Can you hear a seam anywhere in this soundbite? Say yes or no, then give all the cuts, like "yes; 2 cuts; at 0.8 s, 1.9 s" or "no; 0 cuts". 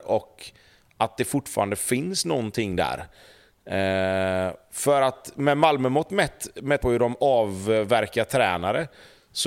yes; 1 cut; at 6.8 s